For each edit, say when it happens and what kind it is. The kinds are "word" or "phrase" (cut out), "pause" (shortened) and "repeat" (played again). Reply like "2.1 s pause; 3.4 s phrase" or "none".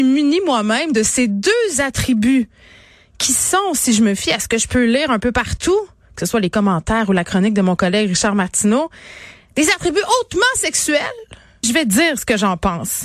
11.6 s word